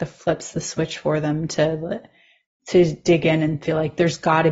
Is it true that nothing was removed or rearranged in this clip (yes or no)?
yes